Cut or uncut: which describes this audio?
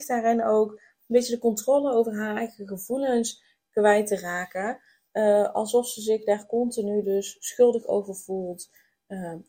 uncut